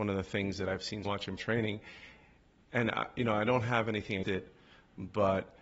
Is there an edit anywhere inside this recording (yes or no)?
yes